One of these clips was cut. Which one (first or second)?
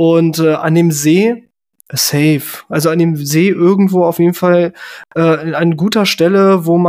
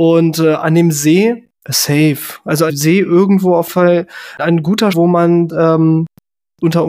second